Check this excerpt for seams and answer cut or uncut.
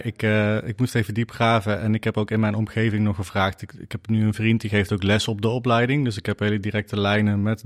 uncut